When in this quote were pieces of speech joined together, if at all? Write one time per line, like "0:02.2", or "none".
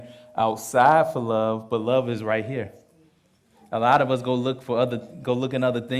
none